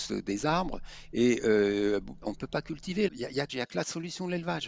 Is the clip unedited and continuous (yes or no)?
no